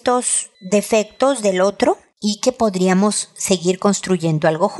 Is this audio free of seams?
yes; 0 cuts

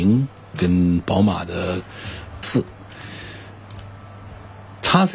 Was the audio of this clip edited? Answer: yes; 1 cut; at 2.4 s

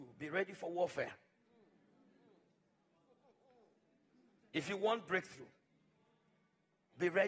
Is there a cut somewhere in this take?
no; 0 cuts

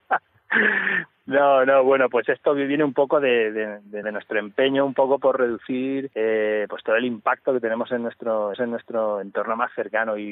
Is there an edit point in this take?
yes; 3 cuts; at 4.0 s, 6.1 s, 8.5 s

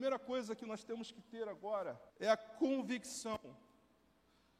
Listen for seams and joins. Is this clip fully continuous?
no; 1 cut; at 2.1 s

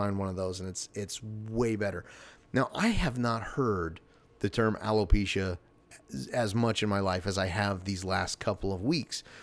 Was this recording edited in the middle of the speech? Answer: no; 0 cuts

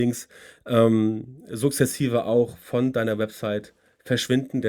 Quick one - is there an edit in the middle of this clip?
no; 0 cuts

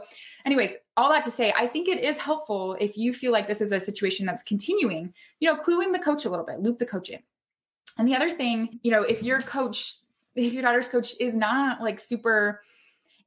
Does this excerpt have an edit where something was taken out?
no; 0 cuts

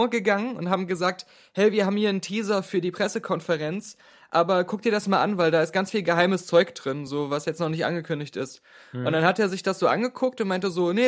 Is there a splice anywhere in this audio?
no; 0 cuts

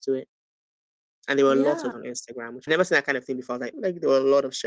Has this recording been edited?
yes; 3 cuts; at 1.9 s, 2.7 s, 3.7 s

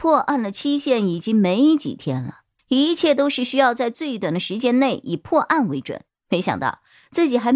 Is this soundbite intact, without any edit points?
no; 2 cuts; at 2.6 s, 6.1 s

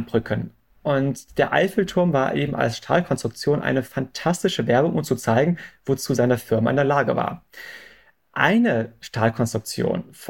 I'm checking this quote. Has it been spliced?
no; 0 cuts

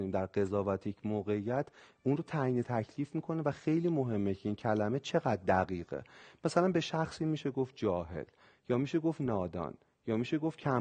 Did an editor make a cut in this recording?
no; 0 cuts

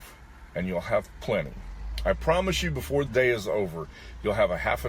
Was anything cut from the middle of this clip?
yes; 1 cut; at 3.1 s

